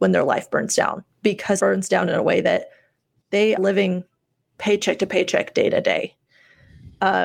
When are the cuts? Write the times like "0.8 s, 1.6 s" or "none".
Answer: 1.6 s, 3.6 s